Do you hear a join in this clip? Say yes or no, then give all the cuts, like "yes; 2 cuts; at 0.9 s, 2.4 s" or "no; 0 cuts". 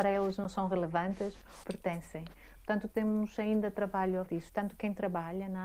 yes; 3 cuts; at 1.6 s, 2.9 s, 4.3 s